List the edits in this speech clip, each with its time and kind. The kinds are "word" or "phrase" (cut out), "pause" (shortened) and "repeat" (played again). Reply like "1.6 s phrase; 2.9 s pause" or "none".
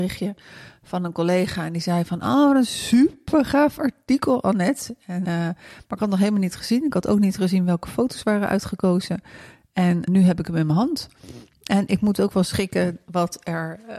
5.2 s word; 10.1 s word